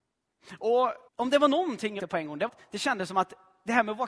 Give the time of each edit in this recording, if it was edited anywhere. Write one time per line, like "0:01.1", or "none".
0:01.1
0:02.0
0:02.5